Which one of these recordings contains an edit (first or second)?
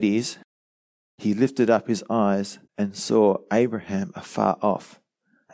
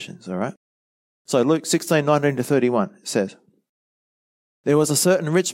first